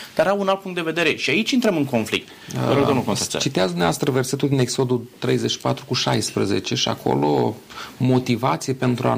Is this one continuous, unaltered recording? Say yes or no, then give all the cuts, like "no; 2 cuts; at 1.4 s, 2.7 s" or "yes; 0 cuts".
yes; 0 cuts